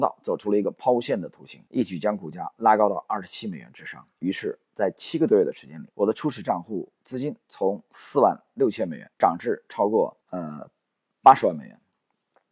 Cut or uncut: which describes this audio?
cut